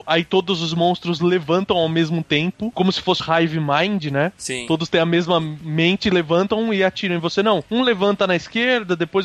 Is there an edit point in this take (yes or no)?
yes